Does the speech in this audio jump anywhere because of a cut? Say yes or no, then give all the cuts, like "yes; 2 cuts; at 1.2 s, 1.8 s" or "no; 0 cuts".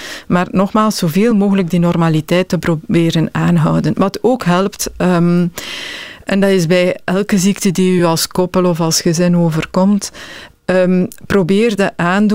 no; 0 cuts